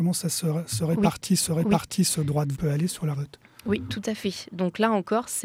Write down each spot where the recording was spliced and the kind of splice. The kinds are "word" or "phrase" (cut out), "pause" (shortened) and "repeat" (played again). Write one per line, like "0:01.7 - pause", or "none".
0:01.5 - repeat
0:02.5 - phrase
0:03.1 - phrase